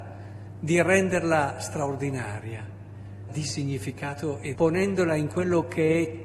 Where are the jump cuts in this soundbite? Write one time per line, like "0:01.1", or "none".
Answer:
0:03.3
0:04.5